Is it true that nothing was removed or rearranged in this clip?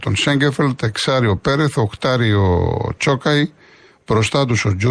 yes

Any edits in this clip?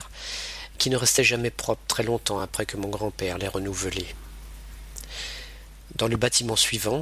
no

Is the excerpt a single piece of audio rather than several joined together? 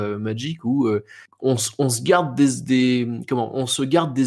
yes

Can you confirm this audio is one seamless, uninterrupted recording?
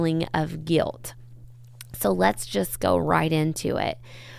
yes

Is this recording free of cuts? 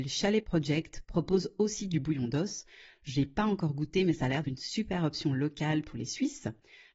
no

